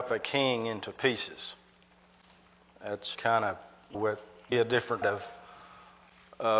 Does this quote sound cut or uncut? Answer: cut